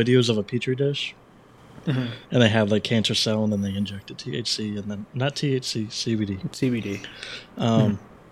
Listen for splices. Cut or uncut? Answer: cut